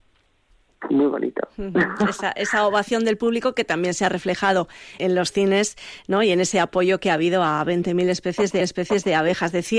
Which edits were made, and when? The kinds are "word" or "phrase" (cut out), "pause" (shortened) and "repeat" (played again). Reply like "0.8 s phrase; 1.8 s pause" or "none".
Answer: 5.0 s word; 8.6 s repeat

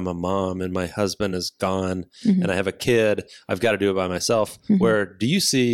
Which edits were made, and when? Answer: none

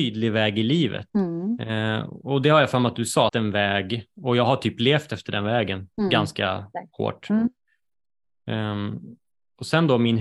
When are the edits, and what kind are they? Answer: 1.1 s pause; 3.3 s phrase; 5.9 s pause

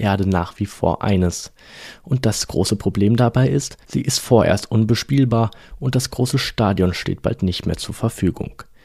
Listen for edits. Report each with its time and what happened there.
3.8 s pause

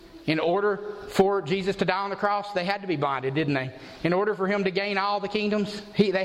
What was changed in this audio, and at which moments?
none

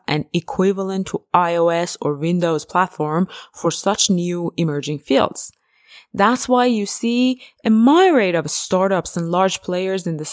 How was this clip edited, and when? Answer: none

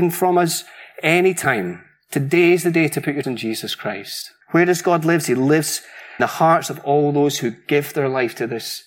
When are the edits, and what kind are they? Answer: 3.2 s word; 4.4 s pause; 6.2 s word

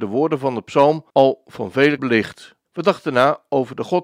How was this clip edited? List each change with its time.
1.1 s pause; 2.0 s word; 2.6 s pause

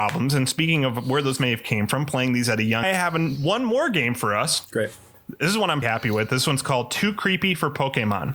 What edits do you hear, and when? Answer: 2.8 s phrase; 5.8 s word

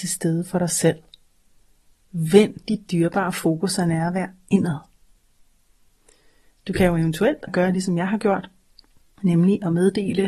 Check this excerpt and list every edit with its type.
7.5 s word

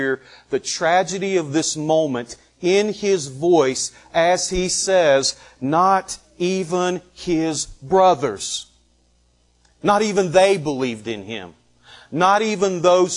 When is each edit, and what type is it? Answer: none

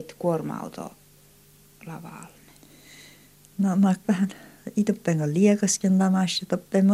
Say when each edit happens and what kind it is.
4.0 s word

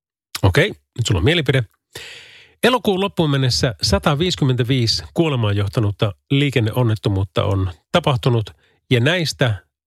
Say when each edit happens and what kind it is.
none

